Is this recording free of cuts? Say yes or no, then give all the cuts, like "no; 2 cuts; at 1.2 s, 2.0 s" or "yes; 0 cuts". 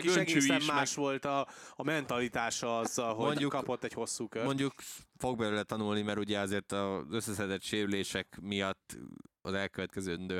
yes; 0 cuts